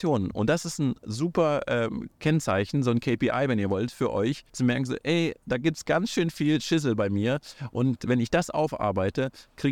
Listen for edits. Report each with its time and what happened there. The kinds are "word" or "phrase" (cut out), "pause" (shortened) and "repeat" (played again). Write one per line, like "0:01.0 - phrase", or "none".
0:04.5 - pause